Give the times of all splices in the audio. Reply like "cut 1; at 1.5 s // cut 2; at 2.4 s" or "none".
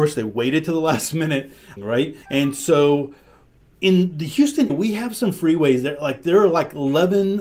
cut 1; at 1.8 s // cut 2; at 2.2 s // cut 3; at 4.7 s